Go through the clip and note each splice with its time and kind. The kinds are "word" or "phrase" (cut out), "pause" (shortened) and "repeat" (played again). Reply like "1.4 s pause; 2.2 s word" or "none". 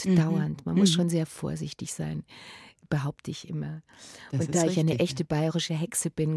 none

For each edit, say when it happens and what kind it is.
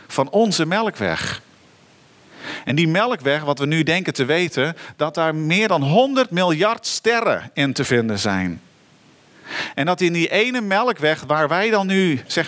none

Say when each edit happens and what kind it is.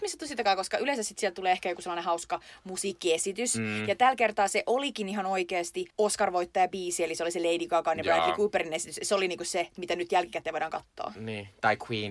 5.9 s pause

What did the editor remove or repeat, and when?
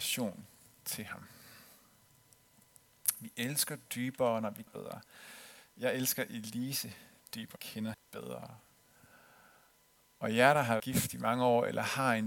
4.7 s word; 7.6 s phrase; 7.9 s word; 10.8 s word

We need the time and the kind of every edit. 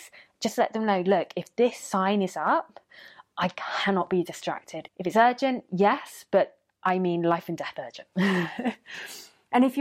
4.9 s phrase

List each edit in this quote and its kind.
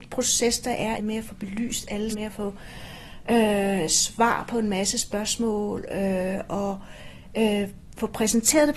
1.0 s word; 2.1 s word

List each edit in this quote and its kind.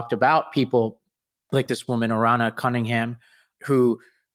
none

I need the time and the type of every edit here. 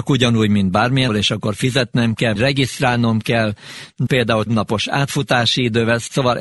1.1 s word; 2.4 s word; 4.1 s word; 4.5 s word

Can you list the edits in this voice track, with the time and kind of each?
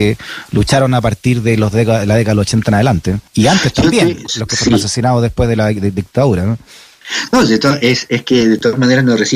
3.3 s pause

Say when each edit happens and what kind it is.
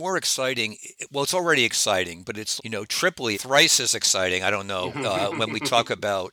2.6 s word; 3.3 s word

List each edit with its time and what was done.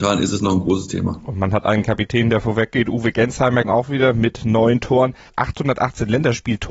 3.6 s word

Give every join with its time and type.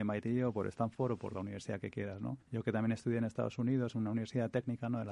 2.4 s pause

